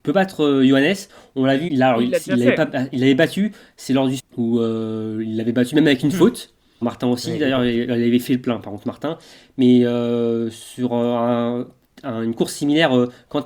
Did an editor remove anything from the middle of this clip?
yes; 3 cuts; at 1.7 s, 4.2 s, 6.8 s

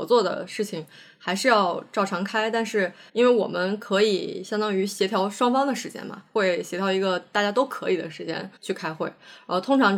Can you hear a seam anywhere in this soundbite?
yes; 2 cuts; at 3.1 s, 8.6 s

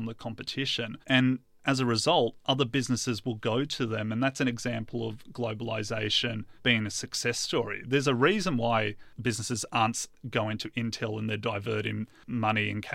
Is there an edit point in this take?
yes; 2 cuts; at 1.0 s, 6.6 s

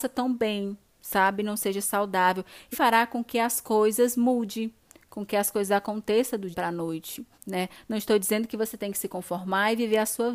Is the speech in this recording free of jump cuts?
no; 3 cuts; at 2.7 s, 6.5 s, 7.3 s

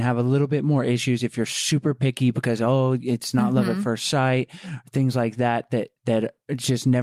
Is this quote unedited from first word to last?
no; 1 cut; at 6.0 s

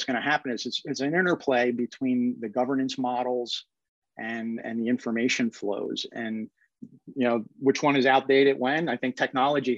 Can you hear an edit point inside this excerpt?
no; 0 cuts

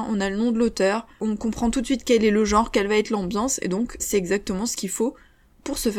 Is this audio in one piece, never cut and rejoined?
no; 1 cut; at 4.0 s

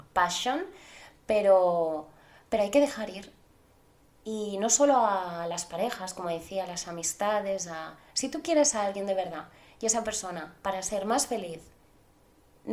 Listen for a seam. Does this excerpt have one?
no; 0 cuts

